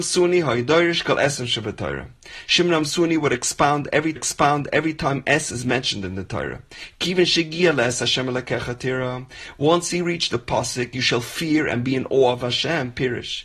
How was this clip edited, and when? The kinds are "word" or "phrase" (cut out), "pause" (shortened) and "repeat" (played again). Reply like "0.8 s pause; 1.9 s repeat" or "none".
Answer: 4.2 s repeat